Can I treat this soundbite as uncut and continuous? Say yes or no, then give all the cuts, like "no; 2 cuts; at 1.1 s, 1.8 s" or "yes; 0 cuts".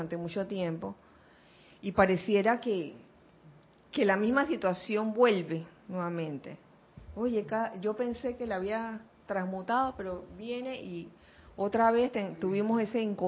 yes; 0 cuts